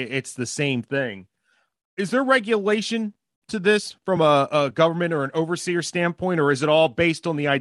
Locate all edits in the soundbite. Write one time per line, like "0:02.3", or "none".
none